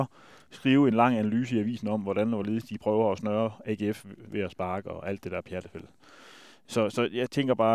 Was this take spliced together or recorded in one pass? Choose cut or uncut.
uncut